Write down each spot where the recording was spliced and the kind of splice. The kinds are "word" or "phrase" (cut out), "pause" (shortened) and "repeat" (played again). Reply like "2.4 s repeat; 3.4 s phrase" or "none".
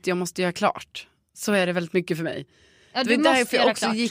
none